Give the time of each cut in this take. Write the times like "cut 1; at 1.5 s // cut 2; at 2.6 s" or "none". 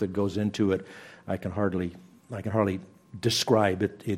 cut 1; at 2.2 s